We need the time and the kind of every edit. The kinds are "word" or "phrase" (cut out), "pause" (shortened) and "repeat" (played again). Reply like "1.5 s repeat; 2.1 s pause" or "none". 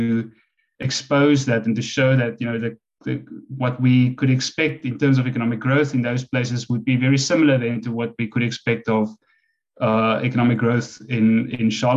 none

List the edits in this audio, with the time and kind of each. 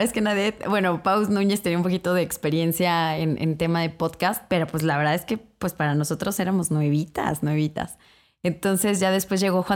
none

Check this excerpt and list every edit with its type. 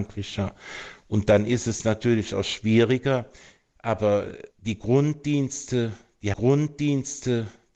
4.5 s pause; 6.3 s repeat

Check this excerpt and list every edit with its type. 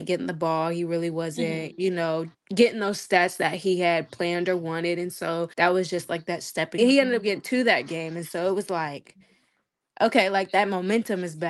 2.3 s word; 5.5 s pause; 6.8 s phrase

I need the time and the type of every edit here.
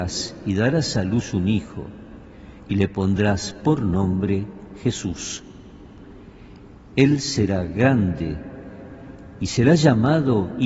none

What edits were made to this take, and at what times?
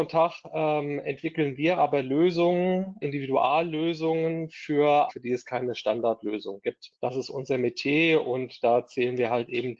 3.0 s word; 5.1 s phrase; 6.9 s pause

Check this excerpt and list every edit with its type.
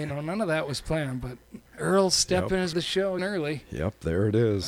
1.7 s pause; 2.7 s phrase; 3.2 s word

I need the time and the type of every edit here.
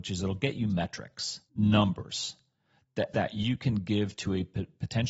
1.5 s pause; 3.1 s word

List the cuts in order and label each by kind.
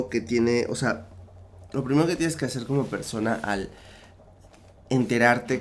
none

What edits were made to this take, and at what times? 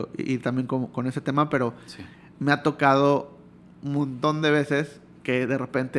none

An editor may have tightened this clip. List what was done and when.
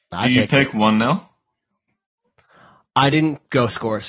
none

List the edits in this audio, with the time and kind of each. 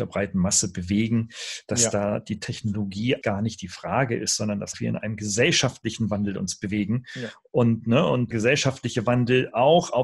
3.2 s word; 4.7 s word; 8.3 s word

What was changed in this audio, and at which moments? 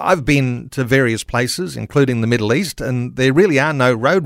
none

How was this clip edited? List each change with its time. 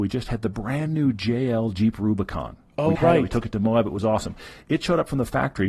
3.0 s word

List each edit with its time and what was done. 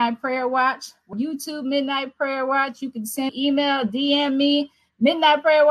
1.1 s word; 3.3 s word

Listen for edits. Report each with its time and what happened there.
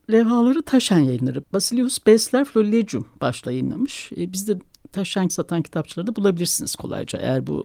1.4 s word; 3.4 s word; 4.6 s word; 5.3 s word

